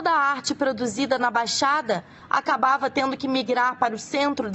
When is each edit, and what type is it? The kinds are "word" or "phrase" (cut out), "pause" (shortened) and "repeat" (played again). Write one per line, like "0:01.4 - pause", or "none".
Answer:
none